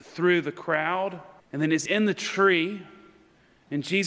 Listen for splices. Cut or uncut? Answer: cut